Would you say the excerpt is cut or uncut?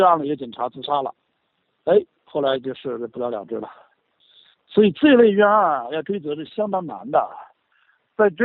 uncut